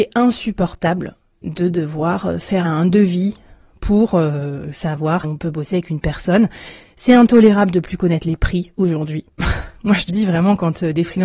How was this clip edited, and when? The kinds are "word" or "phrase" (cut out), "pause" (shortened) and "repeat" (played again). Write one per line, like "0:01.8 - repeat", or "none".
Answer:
0:02.6 - word
0:05.2 - word
0:10.1 - word